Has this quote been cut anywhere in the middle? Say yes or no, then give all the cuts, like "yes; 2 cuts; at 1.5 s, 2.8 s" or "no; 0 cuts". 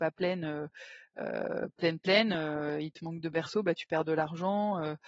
no; 0 cuts